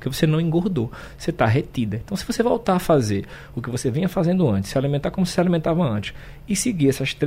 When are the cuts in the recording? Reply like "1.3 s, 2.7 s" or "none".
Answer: none